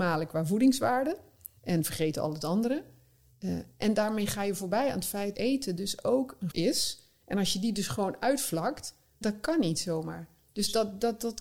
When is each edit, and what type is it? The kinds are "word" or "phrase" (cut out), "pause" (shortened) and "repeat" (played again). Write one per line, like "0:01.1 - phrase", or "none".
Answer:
0:01.6 - pause
0:05.3 - word
0:06.5 - word
0:09.2 - word